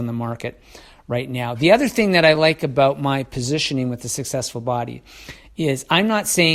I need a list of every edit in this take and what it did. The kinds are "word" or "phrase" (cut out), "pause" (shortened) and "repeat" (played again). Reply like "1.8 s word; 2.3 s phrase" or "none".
none